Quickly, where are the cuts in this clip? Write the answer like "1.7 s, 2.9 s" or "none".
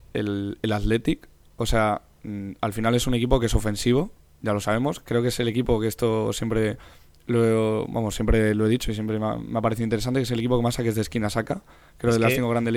none